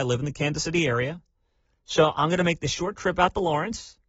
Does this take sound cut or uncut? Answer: uncut